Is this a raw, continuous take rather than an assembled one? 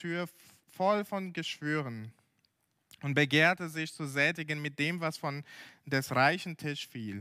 yes; 0 cuts

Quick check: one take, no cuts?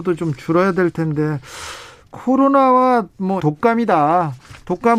no; 1 cut; at 3.4 s

